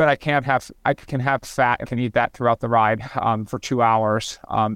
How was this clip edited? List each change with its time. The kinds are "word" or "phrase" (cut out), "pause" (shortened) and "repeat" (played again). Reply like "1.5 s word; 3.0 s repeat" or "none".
1.8 s word